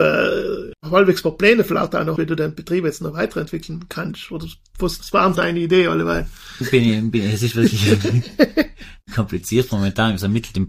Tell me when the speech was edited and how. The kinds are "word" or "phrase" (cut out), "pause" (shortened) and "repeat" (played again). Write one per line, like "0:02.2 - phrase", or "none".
0:02.2 - word
0:05.0 - word
0:05.3 - word
0:06.6 - word